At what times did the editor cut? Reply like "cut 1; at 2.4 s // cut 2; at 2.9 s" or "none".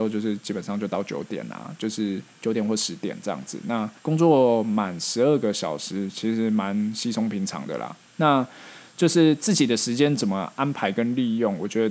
cut 1; at 4.0 s

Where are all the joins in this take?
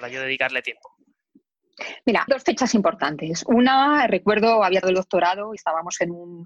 cut 1; at 2.3 s // cut 2; at 4.8 s // cut 3; at 5.6 s

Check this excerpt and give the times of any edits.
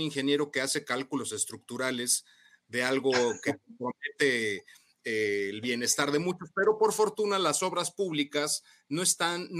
none

